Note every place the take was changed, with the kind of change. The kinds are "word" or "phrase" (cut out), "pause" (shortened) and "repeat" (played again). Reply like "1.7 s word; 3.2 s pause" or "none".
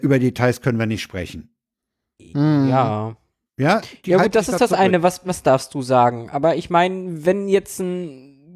none